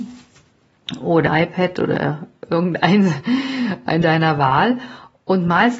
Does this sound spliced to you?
yes; 2 cuts; at 1.3 s, 4.0 s

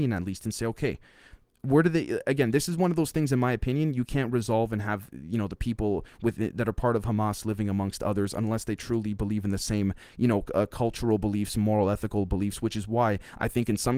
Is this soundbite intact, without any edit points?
yes; 0 cuts

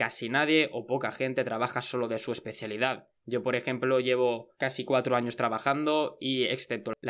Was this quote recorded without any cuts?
no; 2 cuts; at 3.2 s, 4.5 s

